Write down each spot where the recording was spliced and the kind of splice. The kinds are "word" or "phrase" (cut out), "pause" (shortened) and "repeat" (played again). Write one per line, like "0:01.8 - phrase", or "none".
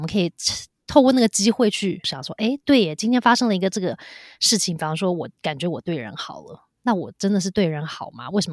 none